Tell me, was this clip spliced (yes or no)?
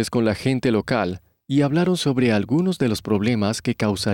no